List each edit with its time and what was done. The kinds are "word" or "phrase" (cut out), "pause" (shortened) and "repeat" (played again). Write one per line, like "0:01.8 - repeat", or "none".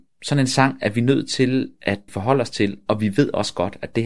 0:02.1 - word